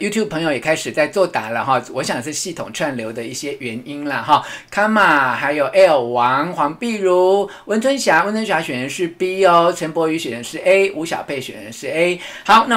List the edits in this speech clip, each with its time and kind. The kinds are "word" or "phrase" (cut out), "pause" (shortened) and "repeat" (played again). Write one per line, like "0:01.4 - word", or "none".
none